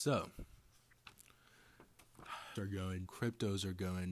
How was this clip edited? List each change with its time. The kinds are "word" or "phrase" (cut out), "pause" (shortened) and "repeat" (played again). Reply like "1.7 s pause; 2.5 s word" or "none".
2.6 s word; 3.1 s word